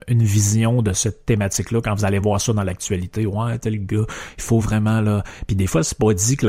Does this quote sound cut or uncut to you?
uncut